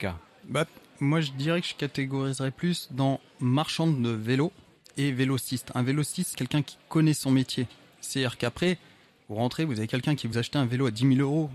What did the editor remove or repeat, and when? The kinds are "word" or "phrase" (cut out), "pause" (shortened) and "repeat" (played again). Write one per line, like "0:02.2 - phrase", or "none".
0:06.3 - word
0:10.3 - word